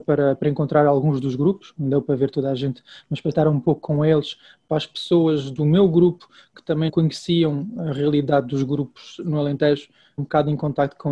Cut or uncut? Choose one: cut